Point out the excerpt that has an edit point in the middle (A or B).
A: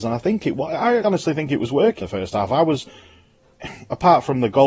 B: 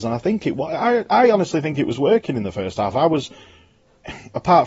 A